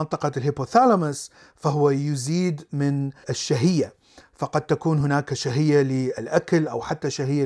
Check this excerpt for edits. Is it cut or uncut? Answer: uncut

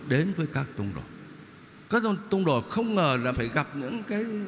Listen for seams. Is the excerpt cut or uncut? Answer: cut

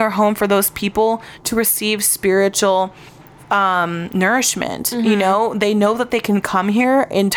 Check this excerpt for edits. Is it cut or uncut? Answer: uncut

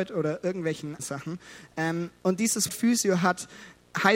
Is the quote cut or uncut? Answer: cut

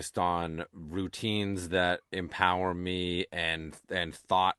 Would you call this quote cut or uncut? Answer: uncut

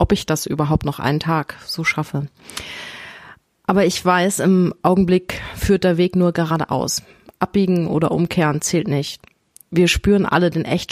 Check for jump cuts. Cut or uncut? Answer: uncut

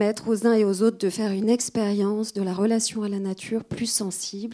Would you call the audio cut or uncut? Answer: uncut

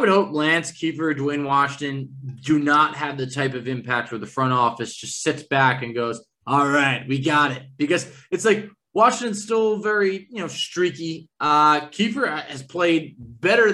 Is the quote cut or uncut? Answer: uncut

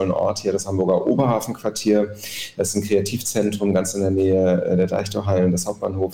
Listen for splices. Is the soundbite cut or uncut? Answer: uncut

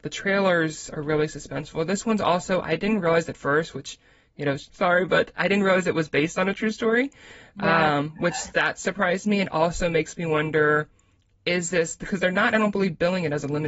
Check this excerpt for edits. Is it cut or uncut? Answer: cut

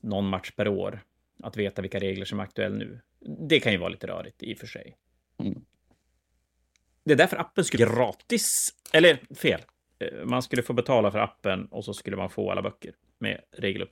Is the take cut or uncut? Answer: cut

